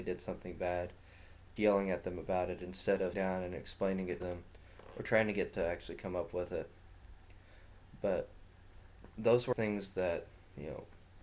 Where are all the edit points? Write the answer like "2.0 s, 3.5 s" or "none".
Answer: 1.6 s, 3.1 s, 4.2 s, 5.5 s, 9.5 s